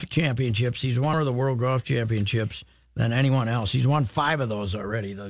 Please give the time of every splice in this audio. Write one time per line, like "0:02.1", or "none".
0:01.1